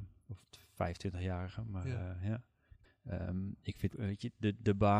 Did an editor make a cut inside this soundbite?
yes; 1 cut; at 3.9 s

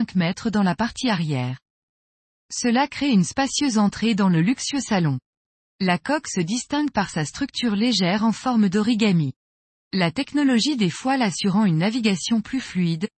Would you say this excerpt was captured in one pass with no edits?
yes; 0 cuts

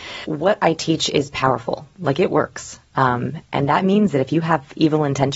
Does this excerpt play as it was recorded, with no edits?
yes; 0 cuts

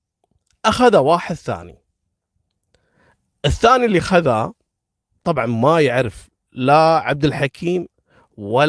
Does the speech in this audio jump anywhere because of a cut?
no; 0 cuts

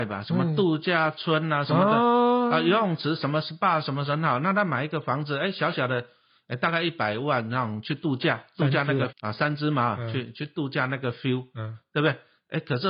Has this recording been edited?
yes; 1 cut; at 9.1 s

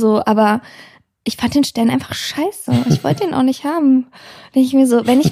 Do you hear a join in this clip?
no; 0 cuts

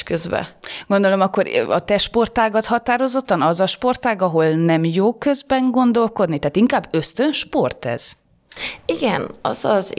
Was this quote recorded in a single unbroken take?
yes; 0 cuts

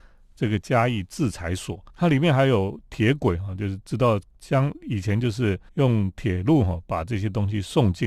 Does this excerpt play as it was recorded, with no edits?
no; 2 cuts; at 1.9 s, 5.7 s

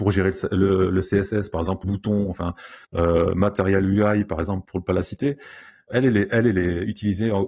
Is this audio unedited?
no; 4 cuts; at 1.8 s, 2.8 s, 4.6 s, 5.9 s

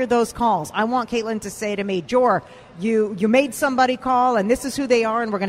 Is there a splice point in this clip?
no; 0 cuts

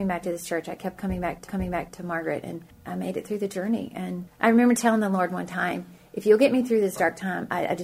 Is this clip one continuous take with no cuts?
no; 1 cut; at 1.5 s

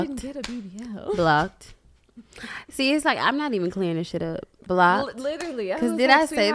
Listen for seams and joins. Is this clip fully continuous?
yes; 0 cuts

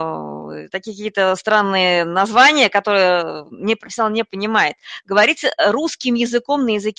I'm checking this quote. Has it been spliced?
no; 0 cuts

